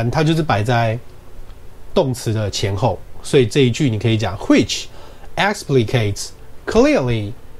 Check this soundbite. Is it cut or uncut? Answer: uncut